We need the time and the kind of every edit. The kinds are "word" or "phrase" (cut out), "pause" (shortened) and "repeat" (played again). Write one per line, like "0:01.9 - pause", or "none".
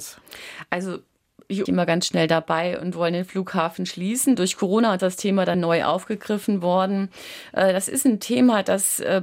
0:01.7 - phrase
0:05.0 - phrase
0:05.5 - word